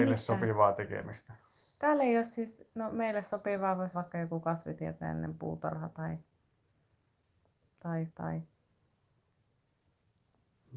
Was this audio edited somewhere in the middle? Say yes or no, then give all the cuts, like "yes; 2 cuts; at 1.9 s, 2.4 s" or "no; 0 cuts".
yes; 1 cut; at 3.9 s